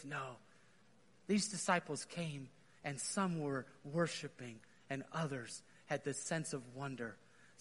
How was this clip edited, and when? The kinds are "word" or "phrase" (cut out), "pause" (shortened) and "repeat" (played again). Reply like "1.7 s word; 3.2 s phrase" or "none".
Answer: none